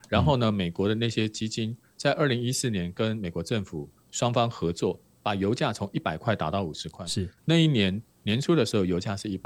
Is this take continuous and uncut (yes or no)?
yes